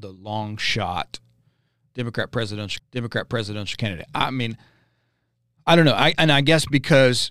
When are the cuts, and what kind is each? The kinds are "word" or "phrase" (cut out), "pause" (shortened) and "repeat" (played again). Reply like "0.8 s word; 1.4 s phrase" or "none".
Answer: 2.8 s repeat